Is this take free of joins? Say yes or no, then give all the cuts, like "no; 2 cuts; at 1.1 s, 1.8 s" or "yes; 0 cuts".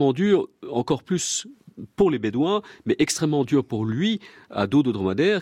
yes; 0 cuts